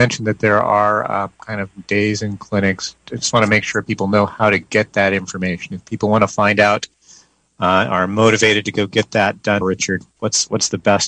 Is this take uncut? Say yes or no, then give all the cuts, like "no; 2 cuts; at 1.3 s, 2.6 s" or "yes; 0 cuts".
no; 1 cut; at 9.6 s